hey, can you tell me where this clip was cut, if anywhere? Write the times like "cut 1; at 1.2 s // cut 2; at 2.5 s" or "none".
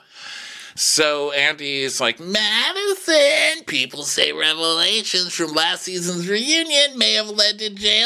none